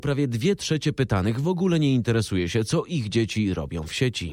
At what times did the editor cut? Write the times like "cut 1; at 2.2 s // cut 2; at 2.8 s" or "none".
none